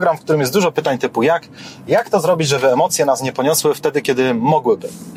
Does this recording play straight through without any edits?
yes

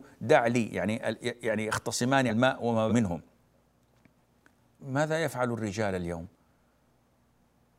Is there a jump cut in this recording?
yes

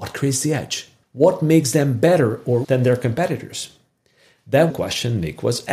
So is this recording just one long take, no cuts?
no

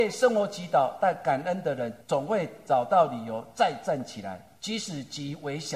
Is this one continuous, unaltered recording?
no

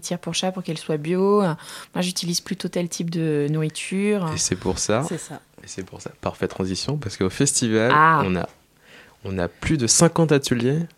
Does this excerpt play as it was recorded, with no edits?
yes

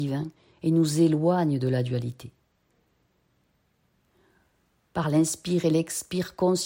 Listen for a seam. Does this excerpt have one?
no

